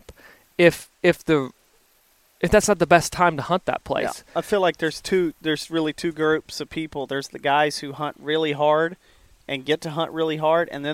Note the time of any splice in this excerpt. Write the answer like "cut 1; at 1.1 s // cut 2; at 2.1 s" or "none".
cut 1; at 0.9 s